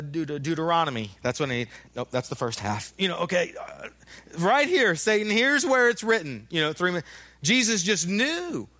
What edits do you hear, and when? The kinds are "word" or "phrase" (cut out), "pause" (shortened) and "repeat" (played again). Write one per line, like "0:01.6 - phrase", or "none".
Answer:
0:01.9 - pause